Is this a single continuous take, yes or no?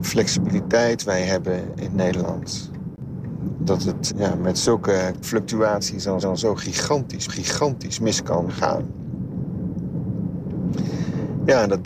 no